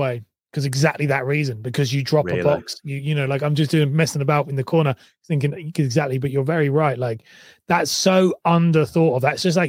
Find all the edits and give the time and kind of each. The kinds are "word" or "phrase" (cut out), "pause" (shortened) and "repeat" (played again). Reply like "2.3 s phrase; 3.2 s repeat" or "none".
none